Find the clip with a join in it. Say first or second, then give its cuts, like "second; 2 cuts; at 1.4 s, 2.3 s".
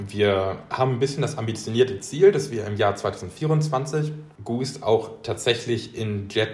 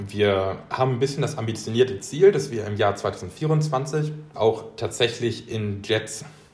second; 1 cut; at 4.3 s